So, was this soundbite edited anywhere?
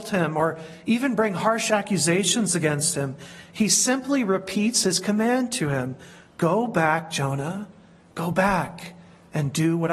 no; 0 cuts

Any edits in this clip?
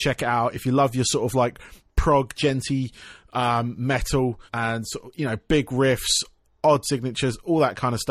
yes; 2 cuts; at 4.5 s, 6.8 s

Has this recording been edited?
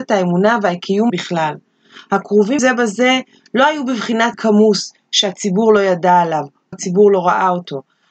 yes; 4 cuts; at 1.1 s, 2.6 s, 4.3 s, 6.7 s

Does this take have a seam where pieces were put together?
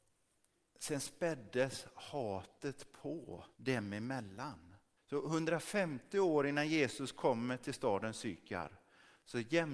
yes; 2 cuts; at 3.5 s, 5.0 s

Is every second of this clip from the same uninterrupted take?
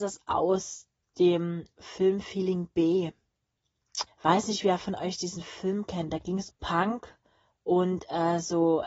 no; 2 cuts; at 4.1 s, 6.5 s

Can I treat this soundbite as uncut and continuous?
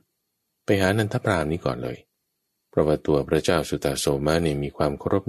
yes; 0 cuts

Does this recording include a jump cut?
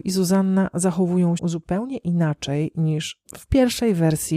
yes; 2 cuts; at 1.4 s, 3.2 s

